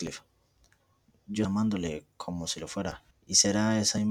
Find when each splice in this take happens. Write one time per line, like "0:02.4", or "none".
0:01.4
0:03.1